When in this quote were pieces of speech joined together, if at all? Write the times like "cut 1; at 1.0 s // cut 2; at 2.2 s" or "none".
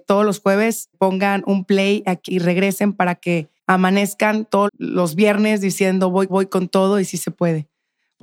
cut 1; at 0.9 s // cut 2; at 2.3 s // cut 3; at 3.6 s // cut 4; at 4.7 s // cut 5; at 6.3 s